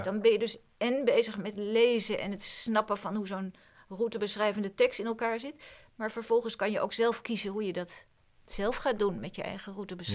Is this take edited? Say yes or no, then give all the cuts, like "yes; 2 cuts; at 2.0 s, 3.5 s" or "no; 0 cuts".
no; 0 cuts